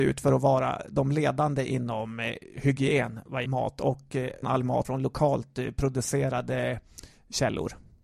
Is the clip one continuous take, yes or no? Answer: no